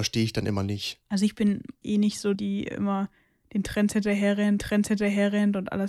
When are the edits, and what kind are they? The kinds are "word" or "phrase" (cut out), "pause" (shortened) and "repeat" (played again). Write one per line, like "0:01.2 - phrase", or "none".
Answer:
0:01.0 - pause
0:01.8 - word
0:02.3 - word
0:04.6 - repeat